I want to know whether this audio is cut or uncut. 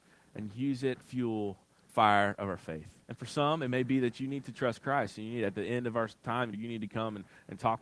cut